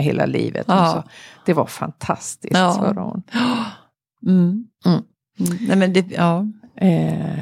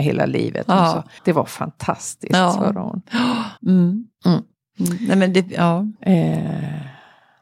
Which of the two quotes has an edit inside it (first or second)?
second